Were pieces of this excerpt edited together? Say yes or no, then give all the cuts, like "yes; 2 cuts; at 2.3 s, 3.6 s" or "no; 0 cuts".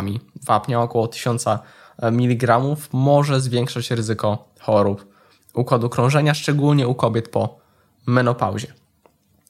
no; 0 cuts